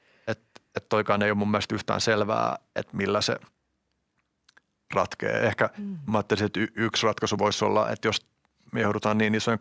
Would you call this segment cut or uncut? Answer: uncut